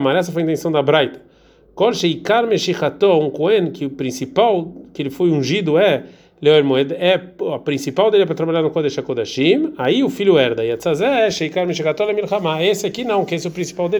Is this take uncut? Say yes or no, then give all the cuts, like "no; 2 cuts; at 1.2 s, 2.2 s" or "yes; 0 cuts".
yes; 0 cuts